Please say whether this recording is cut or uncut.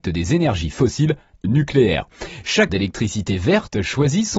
cut